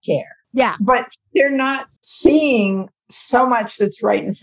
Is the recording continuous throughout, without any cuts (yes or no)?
no